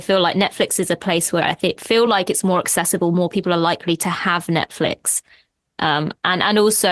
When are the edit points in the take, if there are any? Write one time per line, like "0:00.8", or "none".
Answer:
none

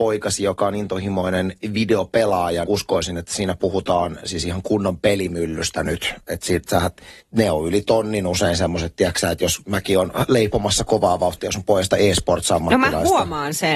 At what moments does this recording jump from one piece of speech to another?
0:02.7
0:07.2

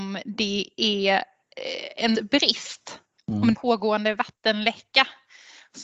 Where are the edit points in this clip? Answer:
0:02.1
0:03.0
0:03.5

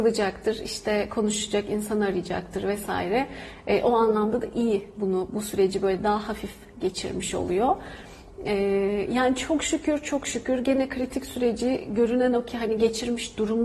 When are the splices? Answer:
none

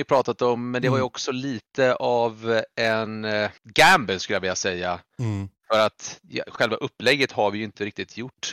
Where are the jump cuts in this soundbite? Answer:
0:03.6

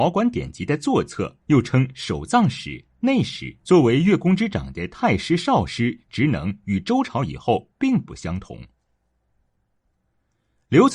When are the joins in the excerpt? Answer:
0:01.4
0:03.6

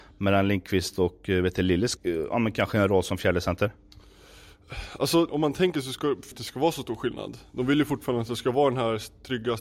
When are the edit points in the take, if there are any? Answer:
0:02.0
0:05.3
0:06.3

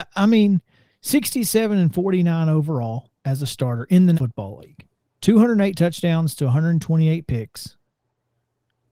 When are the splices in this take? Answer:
0:03.2
0:04.1
0:05.0

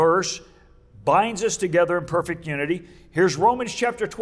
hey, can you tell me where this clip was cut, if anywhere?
none

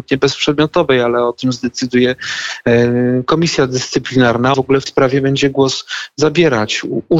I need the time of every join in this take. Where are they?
0:04.5
0:04.9

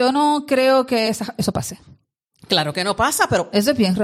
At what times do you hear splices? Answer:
none

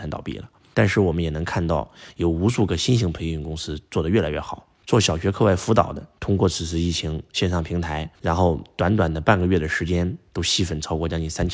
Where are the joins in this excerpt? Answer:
0:08.1

